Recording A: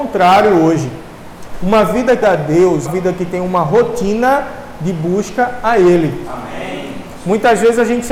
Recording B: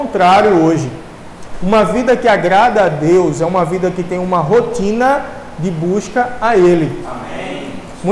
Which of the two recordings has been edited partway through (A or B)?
A